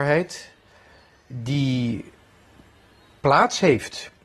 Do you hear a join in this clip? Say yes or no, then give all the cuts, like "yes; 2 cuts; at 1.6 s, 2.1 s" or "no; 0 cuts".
no; 0 cuts